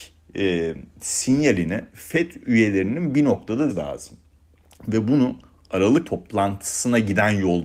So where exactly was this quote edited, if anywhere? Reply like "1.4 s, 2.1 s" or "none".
3.7 s, 6.0 s